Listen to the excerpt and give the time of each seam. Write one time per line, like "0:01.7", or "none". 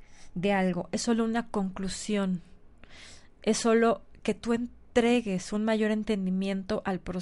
none

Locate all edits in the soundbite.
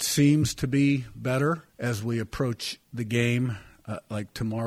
0:01.7
0:02.8

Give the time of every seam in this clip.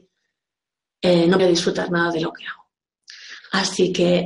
0:01.4

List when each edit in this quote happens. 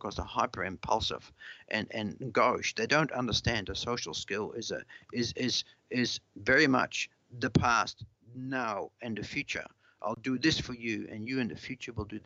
none

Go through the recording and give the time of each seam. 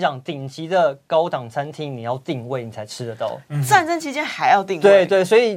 none

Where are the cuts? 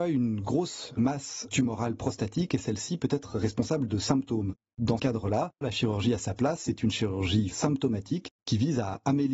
0:05.0
0:05.6
0:07.5

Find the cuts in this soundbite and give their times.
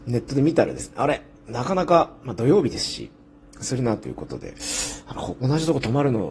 none

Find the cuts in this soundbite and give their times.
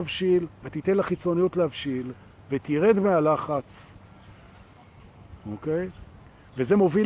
none

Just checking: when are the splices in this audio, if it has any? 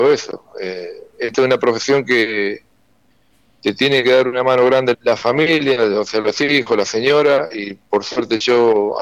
0:04.9

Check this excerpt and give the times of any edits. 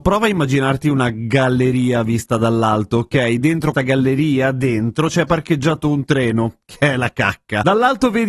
0:03.7

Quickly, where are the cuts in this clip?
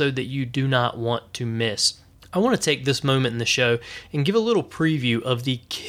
0:02.1

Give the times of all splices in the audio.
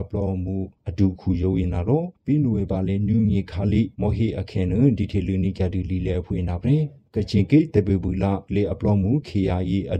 0:02.2

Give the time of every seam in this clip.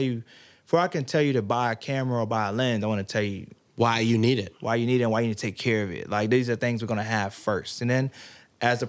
none

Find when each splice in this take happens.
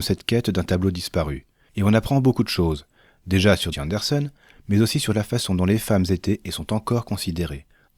0:03.7

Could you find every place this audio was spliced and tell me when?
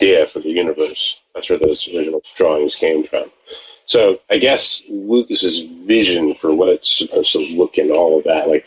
0:02.2
0:04.2
0:07.7

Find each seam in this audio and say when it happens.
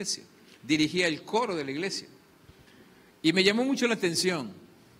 0:02.5

